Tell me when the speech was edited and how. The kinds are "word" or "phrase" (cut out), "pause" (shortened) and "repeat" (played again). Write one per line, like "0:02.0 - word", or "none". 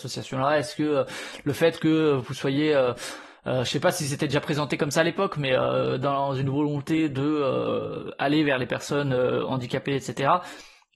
none